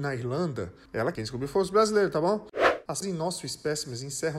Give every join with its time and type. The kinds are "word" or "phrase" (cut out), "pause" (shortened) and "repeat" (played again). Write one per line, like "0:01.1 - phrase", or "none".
0:01.1 - phrase
0:03.0 - word